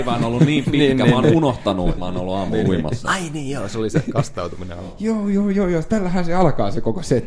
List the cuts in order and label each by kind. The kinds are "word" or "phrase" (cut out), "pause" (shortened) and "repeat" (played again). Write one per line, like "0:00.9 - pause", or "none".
0:02.0 - phrase